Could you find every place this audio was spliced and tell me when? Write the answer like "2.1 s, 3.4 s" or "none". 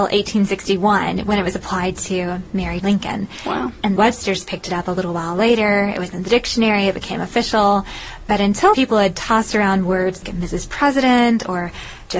2.8 s, 4.0 s, 8.7 s, 10.2 s